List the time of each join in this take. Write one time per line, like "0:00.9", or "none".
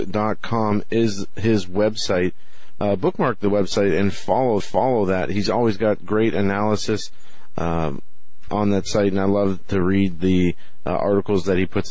0:04.6
0:08.5